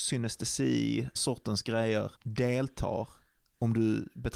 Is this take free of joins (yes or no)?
no